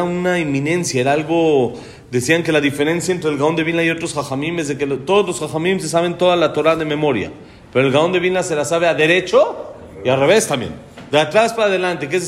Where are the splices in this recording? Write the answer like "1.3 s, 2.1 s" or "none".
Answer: none